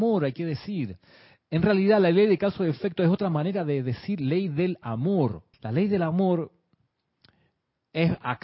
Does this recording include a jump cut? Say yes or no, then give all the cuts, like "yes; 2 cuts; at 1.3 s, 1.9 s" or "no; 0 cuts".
yes; 1 cut; at 5.5 s